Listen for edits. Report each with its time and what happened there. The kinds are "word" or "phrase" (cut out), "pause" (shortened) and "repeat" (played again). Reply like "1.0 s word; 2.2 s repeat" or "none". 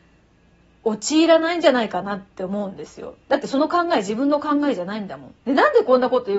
3.2 s pause; 5.4 s pause